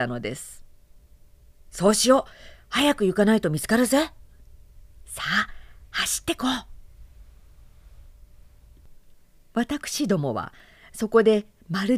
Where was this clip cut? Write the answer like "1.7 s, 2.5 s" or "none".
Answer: none

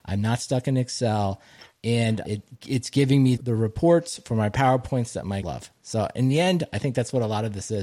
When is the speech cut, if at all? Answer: 2.2 s, 3.4 s, 5.4 s

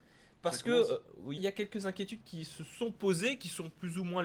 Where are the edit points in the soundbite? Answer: 1.4 s

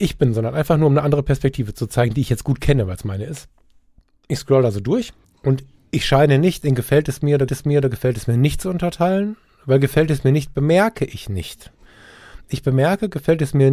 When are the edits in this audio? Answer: 5.2 s, 7.5 s

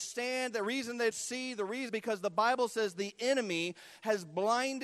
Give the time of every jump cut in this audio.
1.1 s, 1.9 s

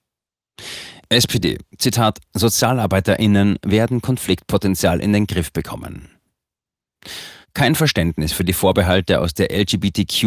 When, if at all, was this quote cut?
7.4 s

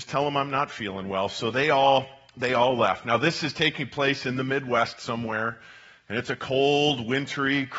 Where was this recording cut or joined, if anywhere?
none

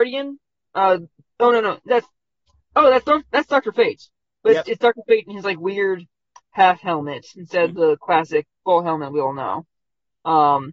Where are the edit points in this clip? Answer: none

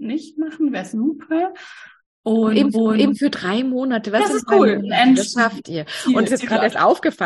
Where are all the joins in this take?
2.0 s, 2.7 s, 6.3 s

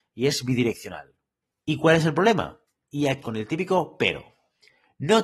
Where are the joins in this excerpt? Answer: 1.4 s, 2.7 s, 3.2 s

